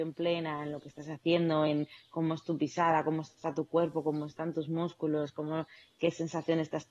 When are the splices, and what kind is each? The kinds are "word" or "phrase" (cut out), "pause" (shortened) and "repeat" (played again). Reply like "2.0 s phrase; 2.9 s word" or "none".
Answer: none

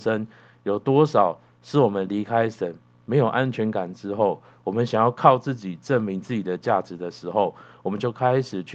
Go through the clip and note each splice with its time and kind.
none

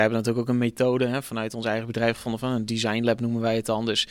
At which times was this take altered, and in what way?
none

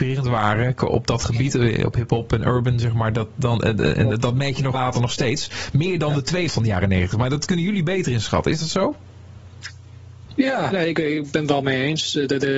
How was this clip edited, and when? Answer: 4.7 s phrase; 6.5 s word; 10.7 s word

